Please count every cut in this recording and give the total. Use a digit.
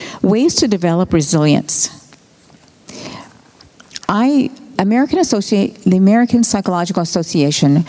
1